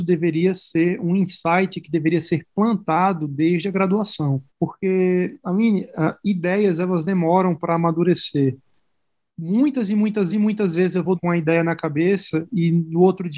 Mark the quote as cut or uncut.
cut